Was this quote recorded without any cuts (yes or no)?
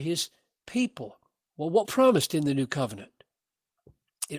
no